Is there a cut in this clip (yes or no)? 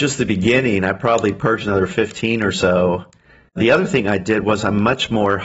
no